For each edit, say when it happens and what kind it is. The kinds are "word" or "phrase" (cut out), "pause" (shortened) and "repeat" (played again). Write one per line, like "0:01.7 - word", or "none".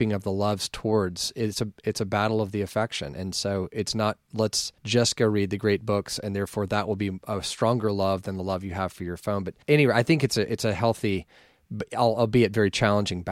0:04.8 - pause
0:09.6 - pause